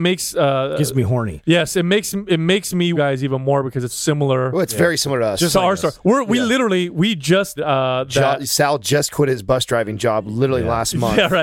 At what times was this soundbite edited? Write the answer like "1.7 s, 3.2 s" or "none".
2.9 s, 3.9 s, 7.6 s